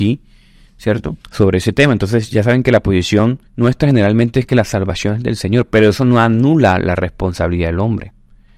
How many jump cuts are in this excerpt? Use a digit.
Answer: 2